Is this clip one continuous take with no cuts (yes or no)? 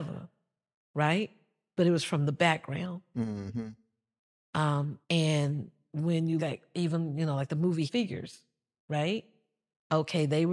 no